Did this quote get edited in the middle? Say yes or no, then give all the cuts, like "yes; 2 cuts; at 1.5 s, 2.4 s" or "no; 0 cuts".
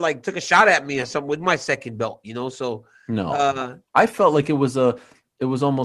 no; 0 cuts